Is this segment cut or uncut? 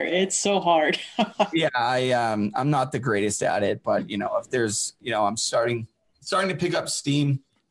uncut